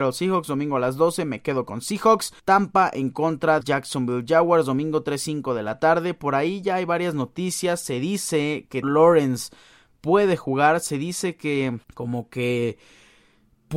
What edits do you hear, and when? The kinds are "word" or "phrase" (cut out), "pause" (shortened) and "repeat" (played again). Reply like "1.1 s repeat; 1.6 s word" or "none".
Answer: 2.4 s pause; 3.6 s word; 8.8 s word; 11.8 s pause